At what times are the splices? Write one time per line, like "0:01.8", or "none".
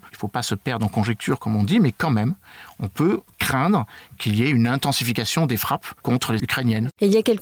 0:06.4